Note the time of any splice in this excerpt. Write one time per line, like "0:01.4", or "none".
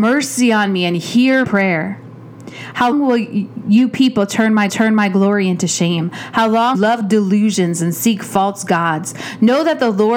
0:01.4
0:02.9
0:04.7
0:06.7